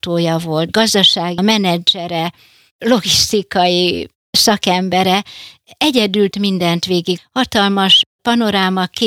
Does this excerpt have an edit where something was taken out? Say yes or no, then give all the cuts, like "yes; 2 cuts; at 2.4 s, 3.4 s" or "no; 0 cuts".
yes; 3 cuts; at 1.4 s, 6.3 s, 7.2 s